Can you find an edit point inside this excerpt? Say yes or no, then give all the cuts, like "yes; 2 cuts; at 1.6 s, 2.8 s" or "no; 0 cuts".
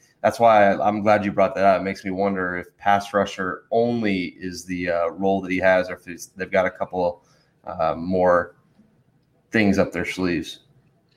no; 0 cuts